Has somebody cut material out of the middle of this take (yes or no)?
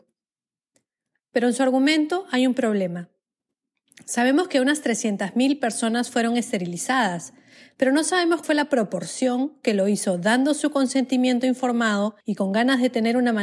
yes